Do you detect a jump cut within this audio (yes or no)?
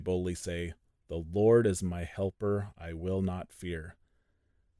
no